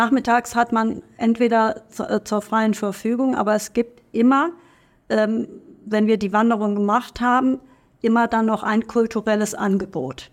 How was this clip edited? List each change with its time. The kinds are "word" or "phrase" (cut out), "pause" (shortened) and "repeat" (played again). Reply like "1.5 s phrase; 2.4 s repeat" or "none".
none